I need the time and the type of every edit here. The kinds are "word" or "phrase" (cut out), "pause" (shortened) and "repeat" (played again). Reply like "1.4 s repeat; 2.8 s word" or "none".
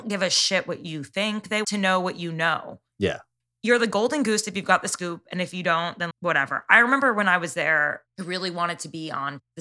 1.6 s word; 6.1 s word

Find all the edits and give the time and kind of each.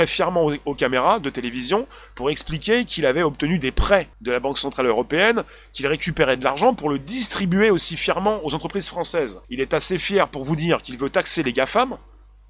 4.1 s pause; 9.4 s pause

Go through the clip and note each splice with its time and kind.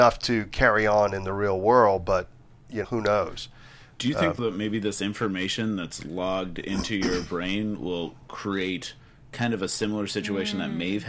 2.8 s word; 4.4 s word

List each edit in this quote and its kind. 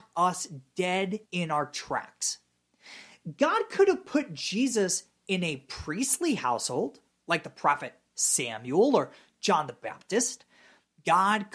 1.2 s pause

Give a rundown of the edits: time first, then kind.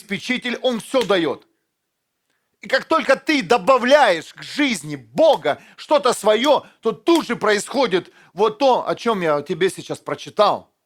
none

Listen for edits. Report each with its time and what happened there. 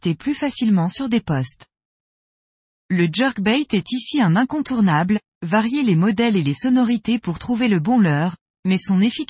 none

